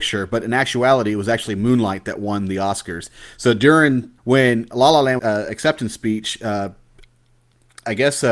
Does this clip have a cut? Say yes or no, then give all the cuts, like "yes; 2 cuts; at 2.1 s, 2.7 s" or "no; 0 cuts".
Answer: yes; 2 cuts; at 4.2 s, 5.2 s